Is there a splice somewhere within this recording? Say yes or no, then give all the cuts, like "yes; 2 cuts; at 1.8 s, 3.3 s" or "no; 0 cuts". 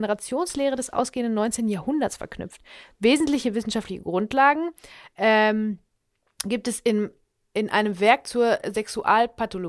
no; 0 cuts